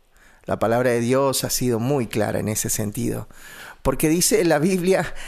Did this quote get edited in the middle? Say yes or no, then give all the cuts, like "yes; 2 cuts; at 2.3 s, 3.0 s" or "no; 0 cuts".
no; 0 cuts